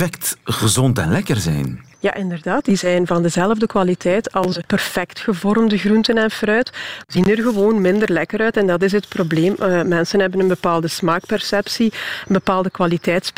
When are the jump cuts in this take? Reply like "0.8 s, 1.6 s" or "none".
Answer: 1.9 s